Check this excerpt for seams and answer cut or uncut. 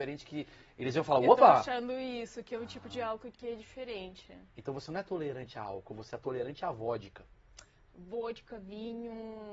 uncut